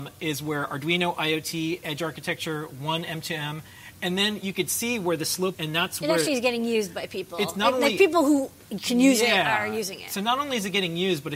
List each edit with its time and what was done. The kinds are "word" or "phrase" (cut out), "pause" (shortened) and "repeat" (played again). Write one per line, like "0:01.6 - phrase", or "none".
0:05.5 - phrase